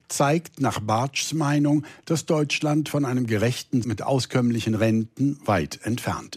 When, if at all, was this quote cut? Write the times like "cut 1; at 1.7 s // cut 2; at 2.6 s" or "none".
cut 1; at 3.8 s